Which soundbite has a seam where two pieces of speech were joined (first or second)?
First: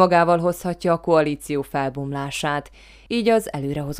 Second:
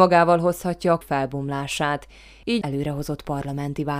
second